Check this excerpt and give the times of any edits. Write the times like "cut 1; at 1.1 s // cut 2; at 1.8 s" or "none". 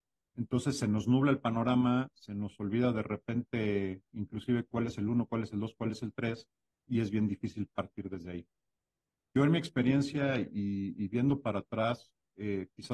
none